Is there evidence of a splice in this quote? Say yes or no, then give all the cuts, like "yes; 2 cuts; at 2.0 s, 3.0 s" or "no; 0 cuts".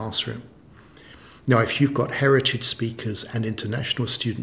no; 0 cuts